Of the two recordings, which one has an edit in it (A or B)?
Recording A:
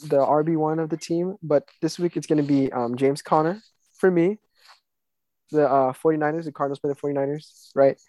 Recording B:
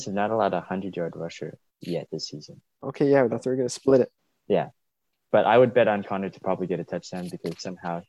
B